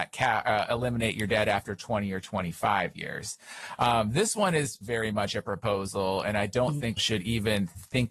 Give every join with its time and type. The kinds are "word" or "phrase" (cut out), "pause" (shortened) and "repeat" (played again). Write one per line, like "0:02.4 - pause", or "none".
0:04.8 - word
0:07.0 - word